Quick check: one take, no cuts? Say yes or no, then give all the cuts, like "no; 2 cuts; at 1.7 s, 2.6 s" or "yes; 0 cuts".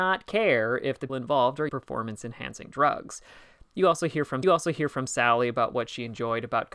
no; 3 cuts; at 1.1 s, 1.7 s, 4.4 s